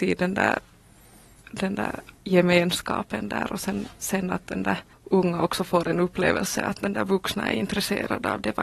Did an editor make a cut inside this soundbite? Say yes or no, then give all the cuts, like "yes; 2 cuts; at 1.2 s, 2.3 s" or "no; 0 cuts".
yes; 1 cut; at 4.9 s